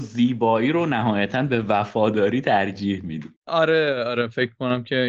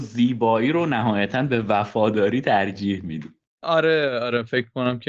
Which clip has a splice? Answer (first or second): first